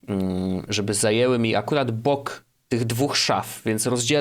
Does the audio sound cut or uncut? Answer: uncut